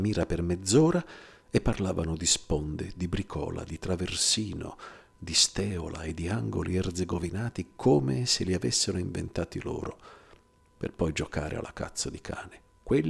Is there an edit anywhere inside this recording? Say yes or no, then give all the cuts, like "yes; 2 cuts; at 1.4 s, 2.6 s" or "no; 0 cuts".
no; 0 cuts